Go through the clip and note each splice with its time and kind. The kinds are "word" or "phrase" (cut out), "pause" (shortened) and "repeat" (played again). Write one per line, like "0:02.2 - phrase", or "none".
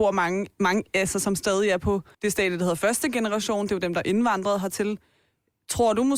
0:02.1 - pause